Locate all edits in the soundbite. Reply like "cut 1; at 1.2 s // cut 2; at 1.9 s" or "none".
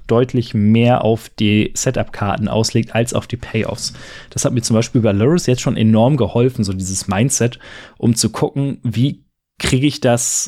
none